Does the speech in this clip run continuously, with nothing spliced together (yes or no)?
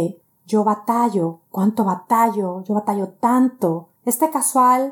no